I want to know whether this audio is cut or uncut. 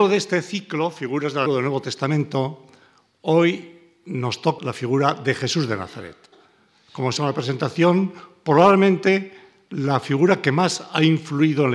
cut